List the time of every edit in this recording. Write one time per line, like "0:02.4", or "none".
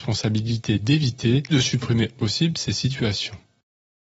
0:01.5
0:02.1